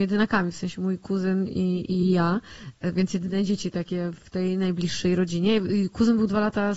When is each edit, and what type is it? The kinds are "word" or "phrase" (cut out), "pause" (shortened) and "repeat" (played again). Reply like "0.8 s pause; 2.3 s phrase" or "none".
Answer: none